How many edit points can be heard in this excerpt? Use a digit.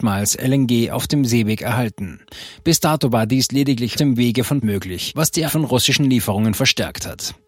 3